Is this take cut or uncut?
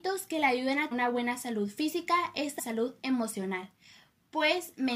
cut